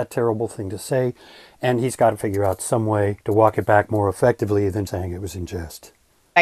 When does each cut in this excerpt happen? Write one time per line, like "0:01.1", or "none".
0:03.2
0:04.9